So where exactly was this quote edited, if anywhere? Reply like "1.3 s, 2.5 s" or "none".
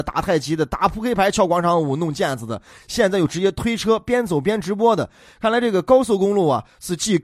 none